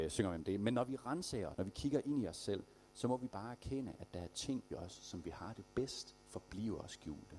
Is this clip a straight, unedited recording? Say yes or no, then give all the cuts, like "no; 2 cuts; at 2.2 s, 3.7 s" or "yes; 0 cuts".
no; 3 cuts; at 1.5 s, 4.7 s, 6.2 s